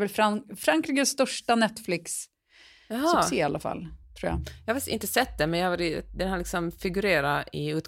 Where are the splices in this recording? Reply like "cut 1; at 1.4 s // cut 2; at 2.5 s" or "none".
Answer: none